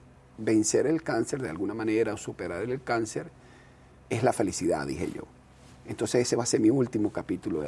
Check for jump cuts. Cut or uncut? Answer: uncut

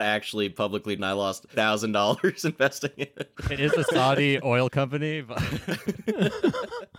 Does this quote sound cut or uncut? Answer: cut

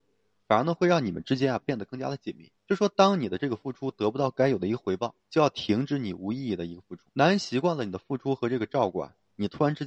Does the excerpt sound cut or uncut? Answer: cut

